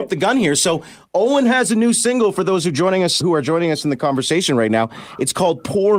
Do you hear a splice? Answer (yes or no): yes